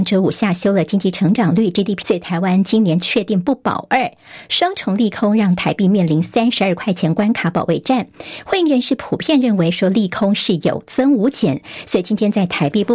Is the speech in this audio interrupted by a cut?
yes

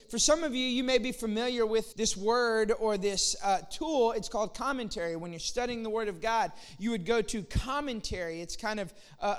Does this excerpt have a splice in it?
yes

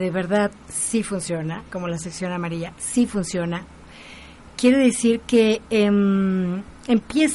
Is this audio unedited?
yes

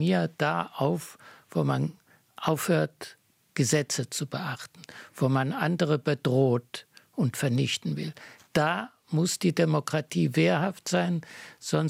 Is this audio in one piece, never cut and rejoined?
yes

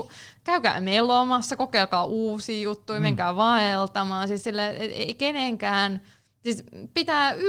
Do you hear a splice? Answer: no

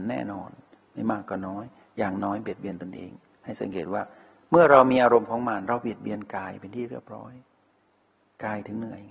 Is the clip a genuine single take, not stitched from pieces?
yes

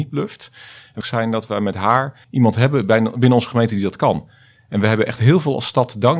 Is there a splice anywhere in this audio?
yes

